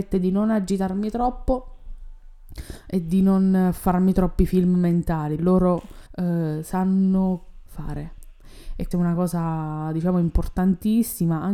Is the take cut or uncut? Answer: cut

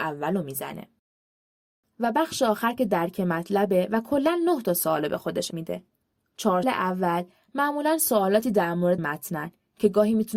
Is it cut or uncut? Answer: cut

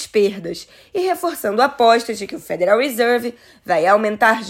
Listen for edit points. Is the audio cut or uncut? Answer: uncut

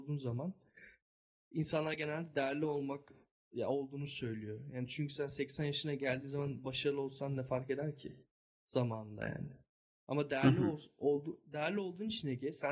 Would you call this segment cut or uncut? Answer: uncut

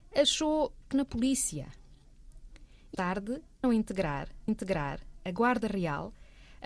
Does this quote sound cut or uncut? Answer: cut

